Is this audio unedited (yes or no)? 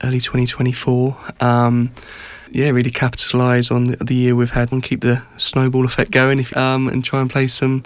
no